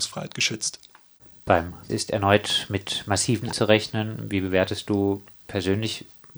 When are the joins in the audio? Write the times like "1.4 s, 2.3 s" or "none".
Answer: 1.9 s, 3.5 s

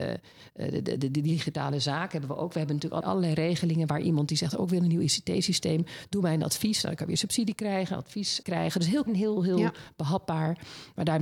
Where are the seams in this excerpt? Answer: 3.0 s, 8.4 s, 9.1 s

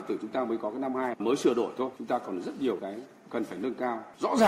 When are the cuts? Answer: 1.2 s, 2.0 s, 2.8 s

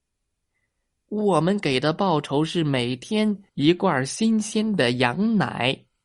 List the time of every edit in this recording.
3.5 s

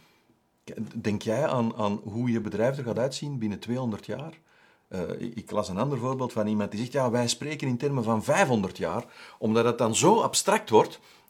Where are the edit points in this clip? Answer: none

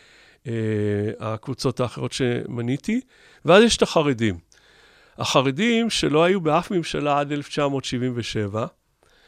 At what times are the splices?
none

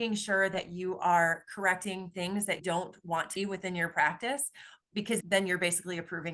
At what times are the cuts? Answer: 2.6 s, 3.4 s, 5.2 s

